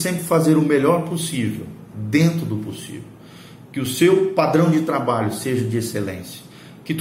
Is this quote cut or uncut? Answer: uncut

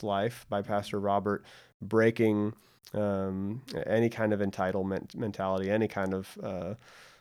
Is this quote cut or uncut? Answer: uncut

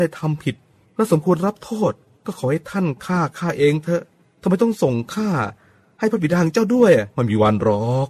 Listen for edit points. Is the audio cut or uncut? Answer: uncut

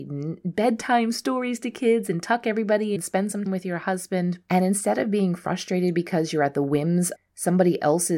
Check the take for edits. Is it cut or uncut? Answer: cut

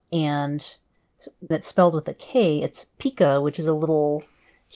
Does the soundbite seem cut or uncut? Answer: cut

